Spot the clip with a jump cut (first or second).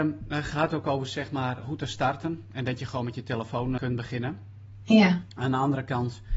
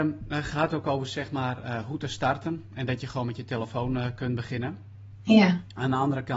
first